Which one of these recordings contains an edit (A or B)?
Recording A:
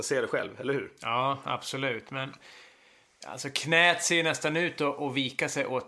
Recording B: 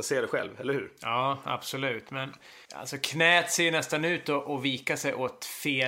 B